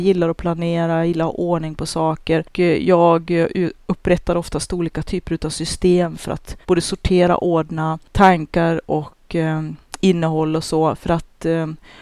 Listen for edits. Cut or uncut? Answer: cut